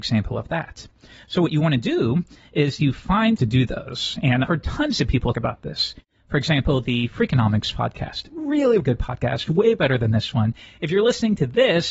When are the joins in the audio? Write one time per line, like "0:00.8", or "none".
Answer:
0:03.4
0:04.5
0:05.3
0:08.8